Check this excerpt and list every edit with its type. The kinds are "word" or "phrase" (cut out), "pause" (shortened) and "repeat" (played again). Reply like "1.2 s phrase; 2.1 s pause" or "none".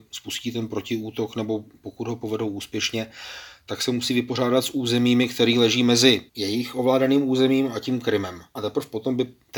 6.3 s pause; 8.5 s pause